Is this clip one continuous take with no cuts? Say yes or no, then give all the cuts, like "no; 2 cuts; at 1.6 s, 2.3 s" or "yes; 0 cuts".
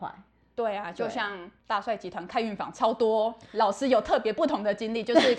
no; 1 cut; at 1.6 s